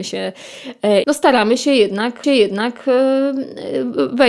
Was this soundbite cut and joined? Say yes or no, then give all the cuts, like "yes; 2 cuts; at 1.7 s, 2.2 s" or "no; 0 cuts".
yes; 2 cuts; at 1.0 s, 2.2 s